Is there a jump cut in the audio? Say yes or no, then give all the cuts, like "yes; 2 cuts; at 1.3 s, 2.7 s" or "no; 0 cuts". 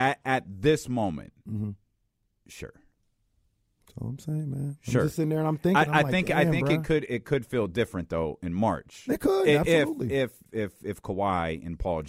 yes; 2 cuts; at 7.1 s, 10.5 s